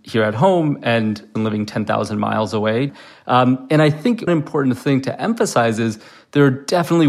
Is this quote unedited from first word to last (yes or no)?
no